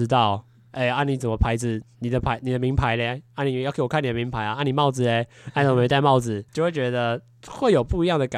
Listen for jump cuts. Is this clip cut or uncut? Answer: cut